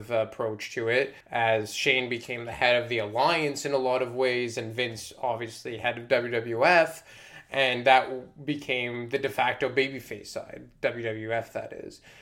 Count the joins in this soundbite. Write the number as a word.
one